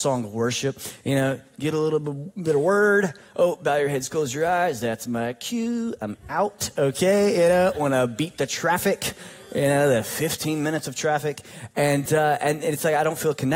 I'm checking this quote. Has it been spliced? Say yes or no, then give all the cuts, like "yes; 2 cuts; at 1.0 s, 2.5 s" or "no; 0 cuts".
no; 0 cuts